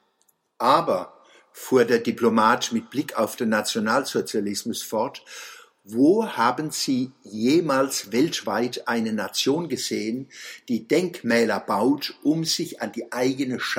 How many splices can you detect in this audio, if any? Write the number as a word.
zero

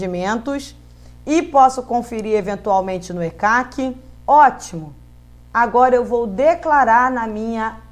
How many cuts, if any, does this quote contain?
one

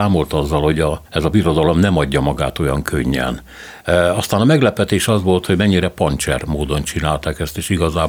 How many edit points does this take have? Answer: one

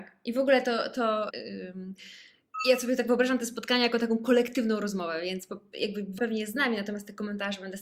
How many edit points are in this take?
two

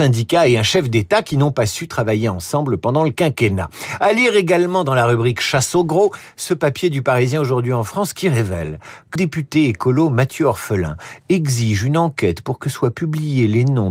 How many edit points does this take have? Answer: one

